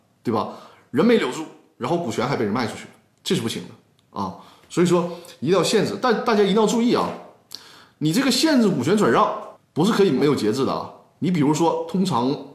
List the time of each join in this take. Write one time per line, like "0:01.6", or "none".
0:09.6